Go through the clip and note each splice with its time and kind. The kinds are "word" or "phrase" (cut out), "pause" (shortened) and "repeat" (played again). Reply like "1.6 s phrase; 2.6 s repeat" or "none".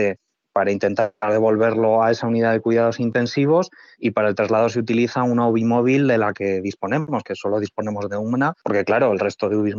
none